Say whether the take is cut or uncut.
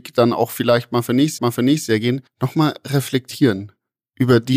cut